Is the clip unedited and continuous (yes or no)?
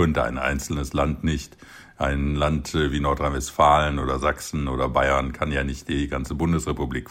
yes